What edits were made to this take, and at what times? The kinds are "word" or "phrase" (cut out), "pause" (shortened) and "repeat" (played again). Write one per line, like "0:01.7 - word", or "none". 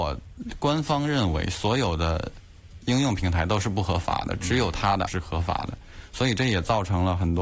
0:05.1 - phrase